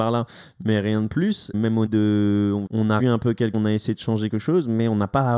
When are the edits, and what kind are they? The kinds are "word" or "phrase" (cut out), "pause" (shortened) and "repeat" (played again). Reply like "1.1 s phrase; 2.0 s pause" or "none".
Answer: 1.5 s word; 1.9 s word; 2.7 s phrase; 3.0 s word; 3.5 s word; 4.3 s word